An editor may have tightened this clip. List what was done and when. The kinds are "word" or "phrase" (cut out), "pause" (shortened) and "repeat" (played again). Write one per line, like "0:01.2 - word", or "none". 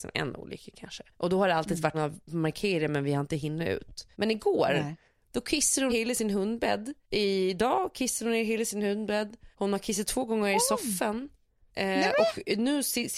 0:01.1 - pause
0:01.9 - phrase
0:04.1 - pause
0:05.9 - word
0:07.0 - pause
0:09.5 - pause